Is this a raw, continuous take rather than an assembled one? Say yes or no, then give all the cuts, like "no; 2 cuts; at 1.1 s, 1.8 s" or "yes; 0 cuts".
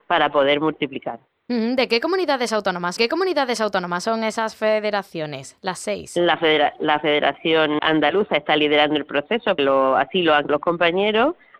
no; 4 cuts; at 3.0 s, 7.8 s, 9.6 s, 10.5 s